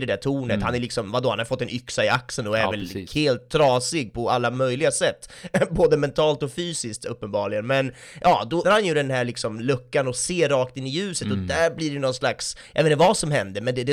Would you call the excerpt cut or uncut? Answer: cut